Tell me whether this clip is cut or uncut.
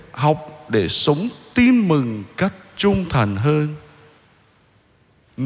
uncut